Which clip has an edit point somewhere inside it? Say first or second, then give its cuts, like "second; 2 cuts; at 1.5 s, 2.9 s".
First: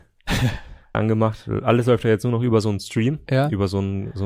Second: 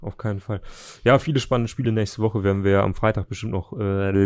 first; 1 cut; at 0.9 s